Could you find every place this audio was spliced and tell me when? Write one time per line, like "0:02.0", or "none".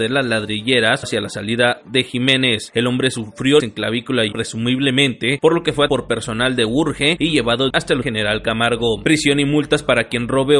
0:01.0
0:03.6
0:04.3
0:05.9
0:07.7
0:08.0